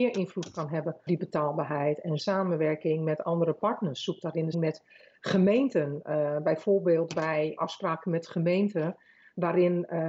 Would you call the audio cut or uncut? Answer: cut